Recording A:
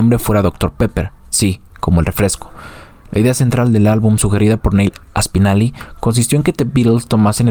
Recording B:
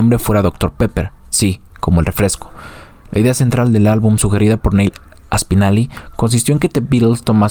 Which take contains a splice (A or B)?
A